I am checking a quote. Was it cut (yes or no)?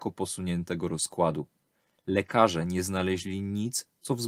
no